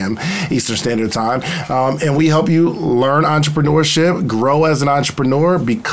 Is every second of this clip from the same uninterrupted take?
yes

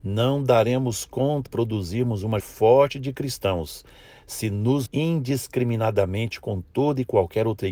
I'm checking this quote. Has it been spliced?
yes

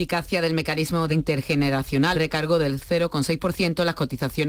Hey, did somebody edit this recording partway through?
yes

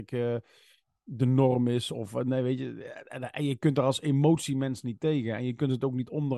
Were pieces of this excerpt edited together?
no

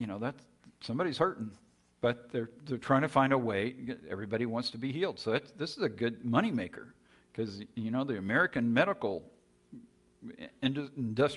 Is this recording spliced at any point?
no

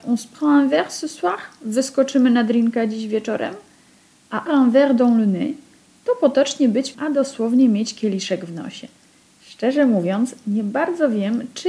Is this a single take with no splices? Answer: no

